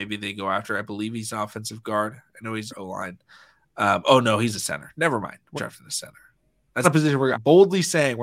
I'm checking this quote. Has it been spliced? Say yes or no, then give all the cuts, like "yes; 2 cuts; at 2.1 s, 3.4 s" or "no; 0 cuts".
yes; 4 cuts; at 2.7 s, 5.6 s, 6.8 s, 7.3 s